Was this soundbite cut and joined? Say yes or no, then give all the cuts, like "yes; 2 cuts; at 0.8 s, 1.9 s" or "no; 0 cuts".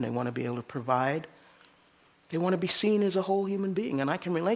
no; 0 cuts